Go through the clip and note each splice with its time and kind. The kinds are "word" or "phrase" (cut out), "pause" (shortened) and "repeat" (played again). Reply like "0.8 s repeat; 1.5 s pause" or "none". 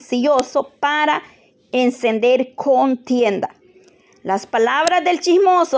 none